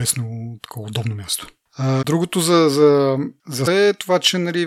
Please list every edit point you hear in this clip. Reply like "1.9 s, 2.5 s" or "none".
2.0 s, 3.7 s